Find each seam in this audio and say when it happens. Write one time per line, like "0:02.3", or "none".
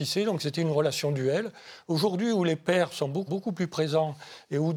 0:03.3